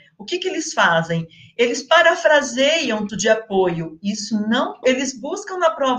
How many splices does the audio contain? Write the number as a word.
two